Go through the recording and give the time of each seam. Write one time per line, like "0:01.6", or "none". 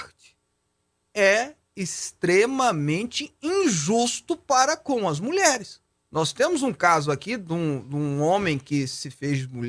0:05.9